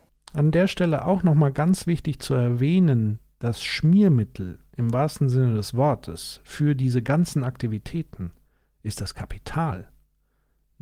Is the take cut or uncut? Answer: uncut